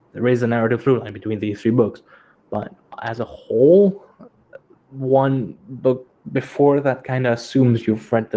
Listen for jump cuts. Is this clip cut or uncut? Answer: uncut